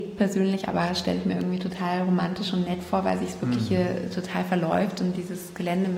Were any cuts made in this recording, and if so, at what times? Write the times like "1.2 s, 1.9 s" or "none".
none